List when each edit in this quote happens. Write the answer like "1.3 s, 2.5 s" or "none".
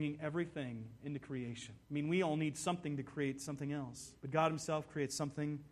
1.8 s, 4.2 s